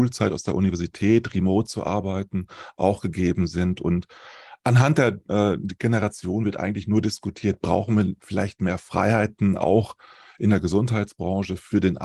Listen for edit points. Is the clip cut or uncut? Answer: uncut